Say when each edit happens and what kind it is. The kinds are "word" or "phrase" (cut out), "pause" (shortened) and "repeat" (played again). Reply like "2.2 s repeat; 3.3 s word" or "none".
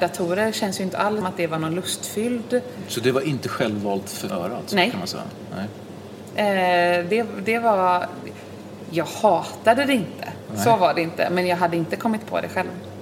1.2 s word; 4.3 s word